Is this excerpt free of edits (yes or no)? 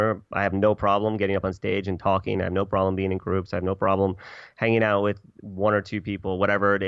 no